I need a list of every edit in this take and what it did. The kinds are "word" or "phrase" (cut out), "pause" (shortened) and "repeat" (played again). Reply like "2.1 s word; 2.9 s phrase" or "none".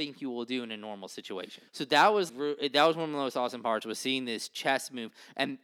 1.7 s pause; 2.3 s word